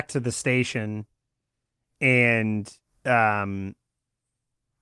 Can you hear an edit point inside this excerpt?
no; 0 cuts

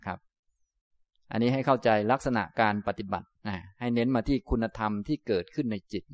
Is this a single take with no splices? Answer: no; 1 cut; at 3.4 s

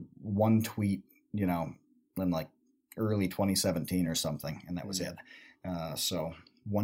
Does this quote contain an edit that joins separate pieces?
no; 0 cuts

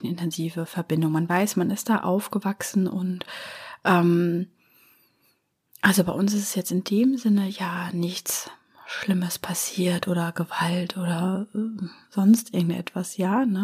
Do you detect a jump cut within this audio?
no; 0 cuts

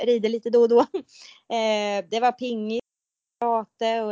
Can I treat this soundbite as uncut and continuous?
yes; 0 cuts

